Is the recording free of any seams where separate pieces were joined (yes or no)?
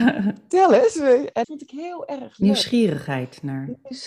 no